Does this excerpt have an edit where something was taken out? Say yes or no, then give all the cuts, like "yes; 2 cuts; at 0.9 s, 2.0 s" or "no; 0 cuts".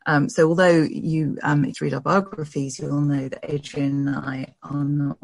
yes; 1 cut; at 1.7 s